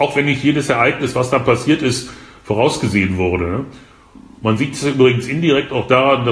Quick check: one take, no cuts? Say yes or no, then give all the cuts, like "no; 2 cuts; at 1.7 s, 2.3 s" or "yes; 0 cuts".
yes; 0 cuts